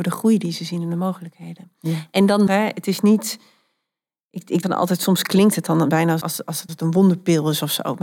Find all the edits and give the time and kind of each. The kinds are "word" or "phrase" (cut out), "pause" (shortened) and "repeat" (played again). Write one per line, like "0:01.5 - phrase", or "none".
0:02.5 - word
0:04.6 - word
0:06.2 - word
0:06.7 - word